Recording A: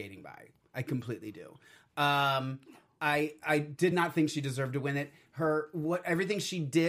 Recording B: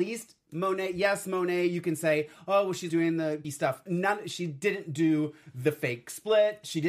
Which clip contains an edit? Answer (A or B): B